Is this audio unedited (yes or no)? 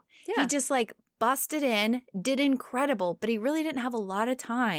yes